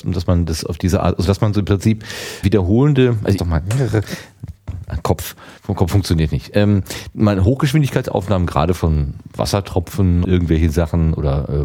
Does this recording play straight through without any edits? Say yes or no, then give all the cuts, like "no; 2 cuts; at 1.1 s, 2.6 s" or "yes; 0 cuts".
no; 4 cuts; at 2.4 s, 3.4 s, 5.6 s, 10.2 s